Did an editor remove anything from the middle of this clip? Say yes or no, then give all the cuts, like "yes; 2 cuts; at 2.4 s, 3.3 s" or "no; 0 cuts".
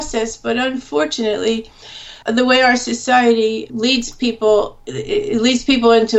yes; 2 cuts; at 2.2 s, 3.7 s